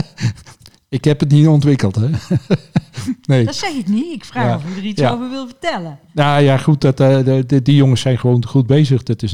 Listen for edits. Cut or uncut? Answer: uncut